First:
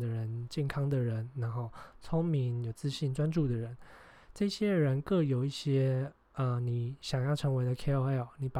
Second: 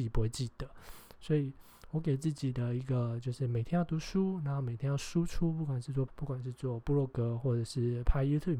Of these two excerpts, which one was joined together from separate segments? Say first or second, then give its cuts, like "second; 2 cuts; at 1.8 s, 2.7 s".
second; 1 cut; at 6.1 s